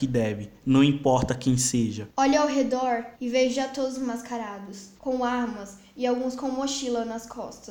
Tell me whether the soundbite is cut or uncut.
cut